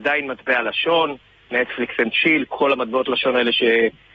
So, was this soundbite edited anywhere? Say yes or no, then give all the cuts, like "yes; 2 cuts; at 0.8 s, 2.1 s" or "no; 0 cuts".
no; 0 cuts